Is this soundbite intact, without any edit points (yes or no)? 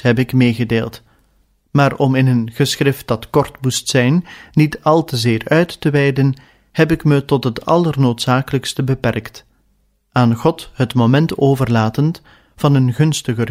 yes